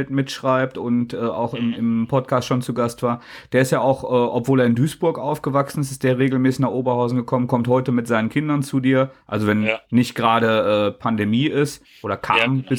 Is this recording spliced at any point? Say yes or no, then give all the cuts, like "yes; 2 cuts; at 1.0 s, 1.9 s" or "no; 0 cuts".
no; 0 cuts